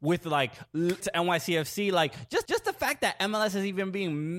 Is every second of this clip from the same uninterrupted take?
no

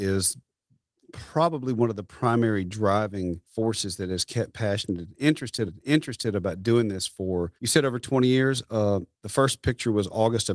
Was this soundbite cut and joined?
yes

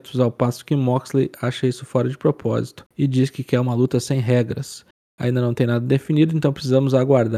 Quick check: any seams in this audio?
no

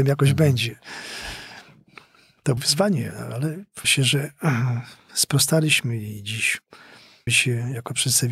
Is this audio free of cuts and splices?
no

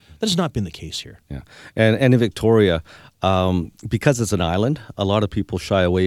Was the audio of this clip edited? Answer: no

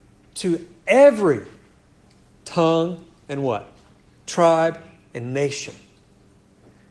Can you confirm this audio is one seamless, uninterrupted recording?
yes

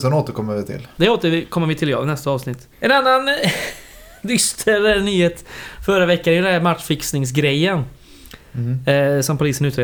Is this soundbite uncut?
no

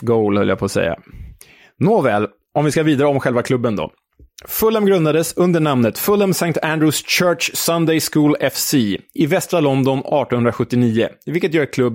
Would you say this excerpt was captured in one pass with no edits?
yes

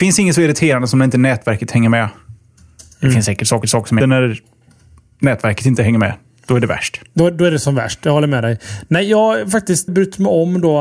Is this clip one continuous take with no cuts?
no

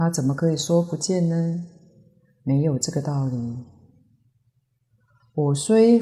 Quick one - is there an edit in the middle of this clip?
no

